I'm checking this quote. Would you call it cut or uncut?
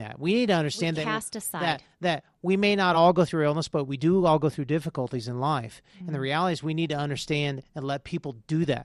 uncut